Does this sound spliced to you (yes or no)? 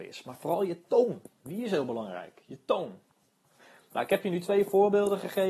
no